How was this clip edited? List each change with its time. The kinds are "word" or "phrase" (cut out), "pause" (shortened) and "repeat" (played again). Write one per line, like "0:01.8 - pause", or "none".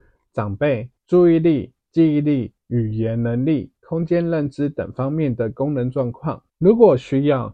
0:01.0 - pause
0:01.8 - pause
0:02.6 - pause
0:03.8 - pause
0:06.5 - pause